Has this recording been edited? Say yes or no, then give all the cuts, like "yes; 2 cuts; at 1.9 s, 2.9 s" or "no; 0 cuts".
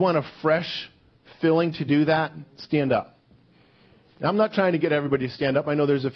no; 0 cuts